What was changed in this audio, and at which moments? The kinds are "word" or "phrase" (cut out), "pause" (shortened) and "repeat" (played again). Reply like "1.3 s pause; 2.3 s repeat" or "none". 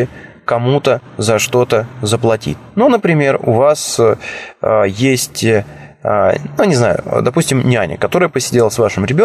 none

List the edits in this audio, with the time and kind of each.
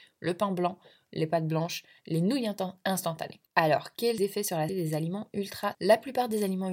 3.5 s pause; 4.2 s phrase; 4.7 s word; 5.7 s word

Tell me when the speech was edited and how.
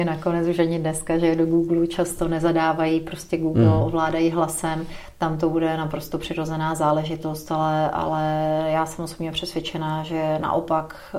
none

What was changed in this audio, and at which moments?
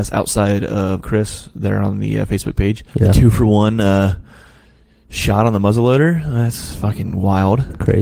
1.0 s word; 2.9 s pause

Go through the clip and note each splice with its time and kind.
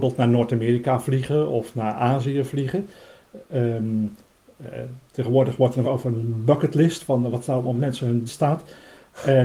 5.8 s phrase; 8.3 s word

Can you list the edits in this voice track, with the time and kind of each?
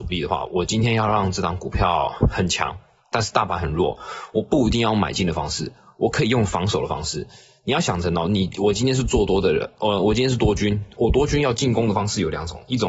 none

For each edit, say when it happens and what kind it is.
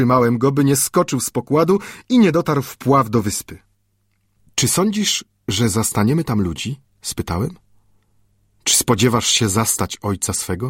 none

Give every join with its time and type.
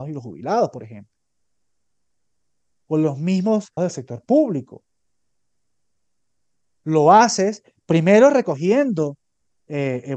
3.8 s word

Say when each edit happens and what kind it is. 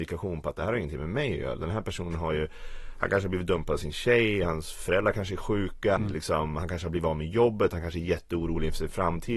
6.0 s word

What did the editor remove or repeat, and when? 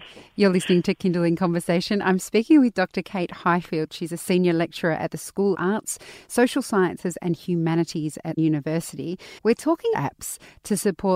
5.5 s word; 8.4 s word; 9.4 s pause; 9.9 s phrase

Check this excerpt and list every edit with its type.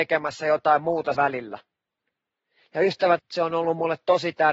1.1 s word; 3.2 s word

